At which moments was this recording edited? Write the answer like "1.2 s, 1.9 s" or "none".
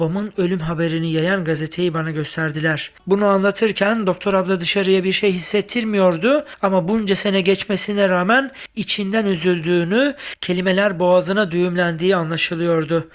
none